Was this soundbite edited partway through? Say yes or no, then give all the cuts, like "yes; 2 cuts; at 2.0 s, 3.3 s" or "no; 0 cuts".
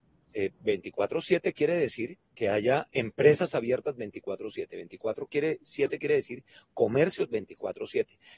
yes; 1 cut; at 2.2 s